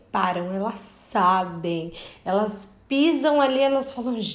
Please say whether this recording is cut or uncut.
uncut